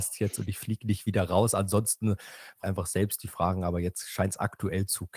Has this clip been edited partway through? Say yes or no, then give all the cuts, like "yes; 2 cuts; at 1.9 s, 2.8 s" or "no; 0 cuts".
yes; 1 cut; at 2.6 s